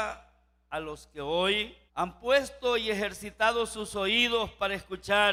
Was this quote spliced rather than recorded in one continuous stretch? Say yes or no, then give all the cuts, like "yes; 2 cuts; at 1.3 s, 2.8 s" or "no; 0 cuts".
yes; 1 cut; at 1.9 s